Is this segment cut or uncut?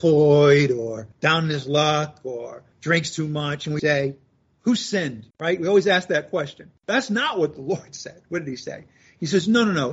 cut